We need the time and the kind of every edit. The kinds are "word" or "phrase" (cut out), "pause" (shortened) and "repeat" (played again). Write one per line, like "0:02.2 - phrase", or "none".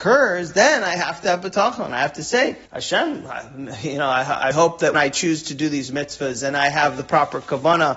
0:02.7 - pause
0:04.5 - word
0:04.9 - word